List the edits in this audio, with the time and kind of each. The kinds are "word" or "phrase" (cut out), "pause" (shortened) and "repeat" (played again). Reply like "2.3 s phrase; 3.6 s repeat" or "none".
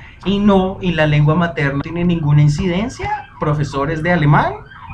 1.8 s word